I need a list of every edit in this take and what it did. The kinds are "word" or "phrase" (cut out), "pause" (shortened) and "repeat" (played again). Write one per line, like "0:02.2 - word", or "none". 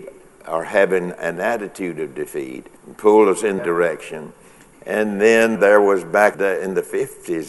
0:02.8 - pause
0:03.6 - word
0:05.6 - word
0:06.3 - phrase